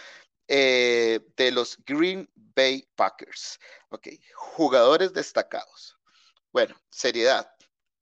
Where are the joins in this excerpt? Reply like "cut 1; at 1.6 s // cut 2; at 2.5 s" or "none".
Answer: cut 1; at 2.9 s // cut 2; at 6.8 s